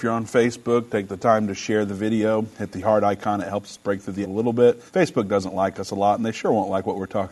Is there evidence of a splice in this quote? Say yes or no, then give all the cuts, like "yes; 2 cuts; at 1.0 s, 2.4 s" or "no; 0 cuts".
yes; 2 cuts; at 4.2 s, 4.9 s